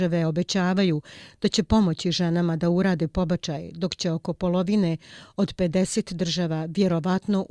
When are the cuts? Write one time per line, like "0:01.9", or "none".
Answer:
none